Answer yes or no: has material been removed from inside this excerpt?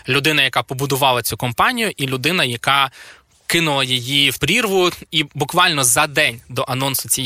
yes